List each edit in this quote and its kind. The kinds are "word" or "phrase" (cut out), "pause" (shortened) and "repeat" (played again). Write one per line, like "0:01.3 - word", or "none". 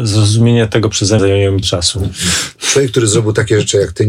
0:01.2 - word
0:01.6 - word